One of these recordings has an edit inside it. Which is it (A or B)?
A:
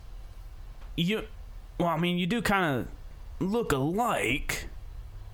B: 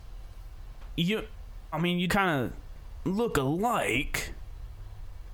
B